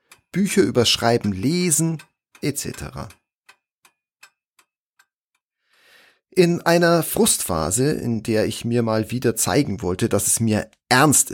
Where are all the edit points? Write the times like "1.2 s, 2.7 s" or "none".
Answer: none